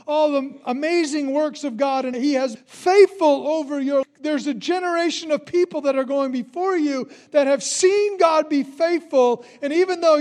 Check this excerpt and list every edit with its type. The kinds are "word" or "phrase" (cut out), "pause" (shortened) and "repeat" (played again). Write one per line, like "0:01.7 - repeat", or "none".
0:02.1 - phrase
0:02.6 - word
0:04.0 - phrase